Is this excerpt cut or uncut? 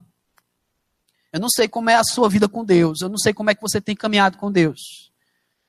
uncut